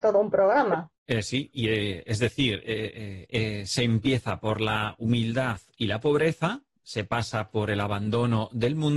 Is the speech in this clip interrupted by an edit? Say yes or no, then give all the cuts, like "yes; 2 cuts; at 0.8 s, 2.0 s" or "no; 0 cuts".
yes; 1 cut; at 0.9 s